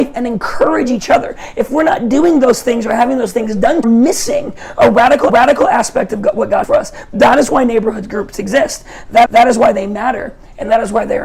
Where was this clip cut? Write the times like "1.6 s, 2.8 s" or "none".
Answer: 3.8 s, 5.3 s, 6.6 s, 9.3 s